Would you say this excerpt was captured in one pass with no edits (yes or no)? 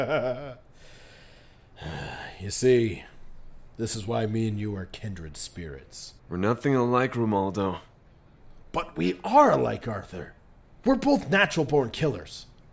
no